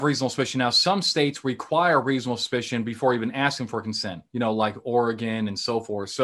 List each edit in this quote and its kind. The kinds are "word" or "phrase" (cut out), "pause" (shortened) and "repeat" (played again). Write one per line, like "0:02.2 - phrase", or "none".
0:04.3 - pause